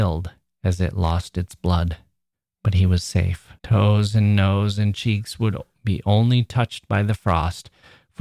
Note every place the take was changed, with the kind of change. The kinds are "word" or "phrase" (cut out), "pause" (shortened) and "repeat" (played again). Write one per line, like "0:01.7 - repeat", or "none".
0:02.3 - pause
0:03.6 - pause